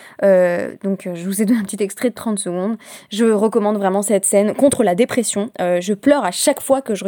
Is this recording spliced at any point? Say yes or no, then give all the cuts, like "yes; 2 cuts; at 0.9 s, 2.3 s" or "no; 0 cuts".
no; 0 cuts